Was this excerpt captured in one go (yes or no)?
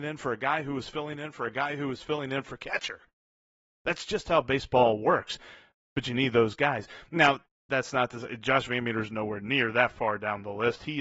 yes